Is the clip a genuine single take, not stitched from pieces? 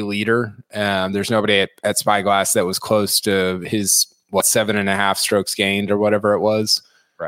yes; 0 cuts

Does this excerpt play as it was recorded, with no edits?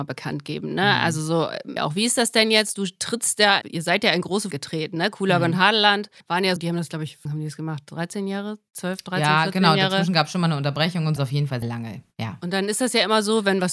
no; 8 cuts; at 1.8 s, 3.6 s, 4.5 s, 6.2 s, 6.6 s, 7.3 s, 11.2 s, 11.6 s

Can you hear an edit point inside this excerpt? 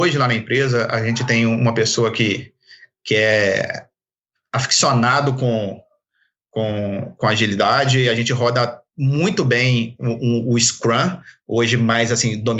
no; 0 cuts

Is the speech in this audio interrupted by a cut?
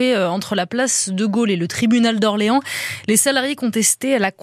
no; 0 cuts

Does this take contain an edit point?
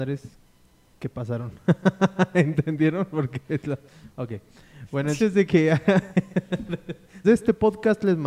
yes; 2 cuts; at 5.2 s, 7.2 s

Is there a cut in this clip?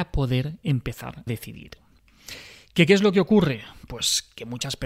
yes; 1 cut; at 1.3 s

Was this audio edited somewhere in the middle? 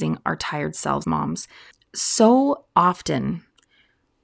yes; 2 cuts; at 1.0 s, 1.7 s

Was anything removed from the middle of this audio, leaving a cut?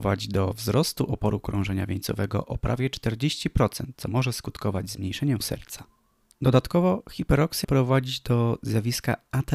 yes; 3 cuts; at 3.9 s, 5.4 s, 7.6 s

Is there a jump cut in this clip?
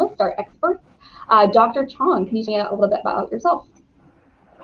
yes; 1 cut; at 2.5 s

